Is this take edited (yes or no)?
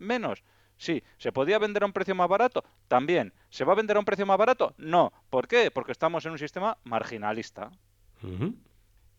no